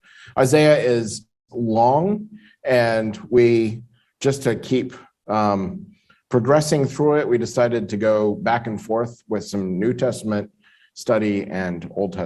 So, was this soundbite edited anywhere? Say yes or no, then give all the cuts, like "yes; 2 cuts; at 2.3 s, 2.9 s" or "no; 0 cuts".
no; 0 cuts